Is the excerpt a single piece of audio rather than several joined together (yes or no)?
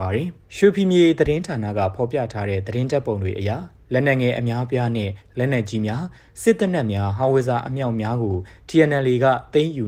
yes